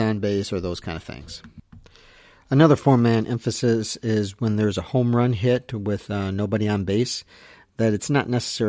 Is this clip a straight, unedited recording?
yes; 0 cuts

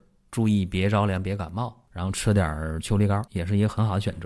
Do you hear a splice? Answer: yes; 2 cuts; at 1.9 s, 3.3 s

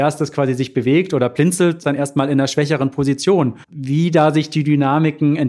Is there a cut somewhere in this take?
yes; 2 cuts; at 1.8 s, 3.6 s

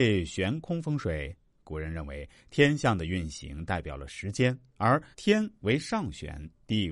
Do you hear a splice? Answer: yes; 1 cut; at 5.1 s

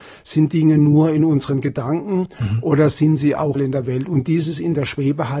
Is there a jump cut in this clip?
yes; 1 cut; at 3.5 s

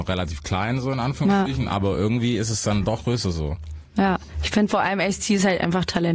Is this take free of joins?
no; 1 cut; at 3.0 s

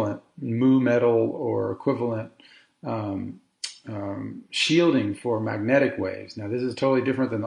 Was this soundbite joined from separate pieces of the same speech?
no; 0 cuts

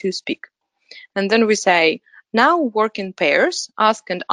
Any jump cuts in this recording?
no; 0 cuts

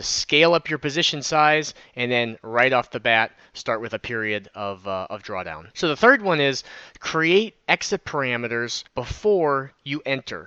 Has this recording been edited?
yes; 2 cuts; at 5.7 s, 8.9 s

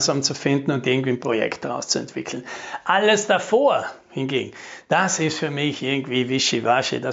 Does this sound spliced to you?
no; 0 cuts

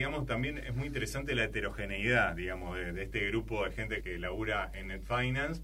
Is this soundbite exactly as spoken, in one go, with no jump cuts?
no; 1 cut; at 4.0 s

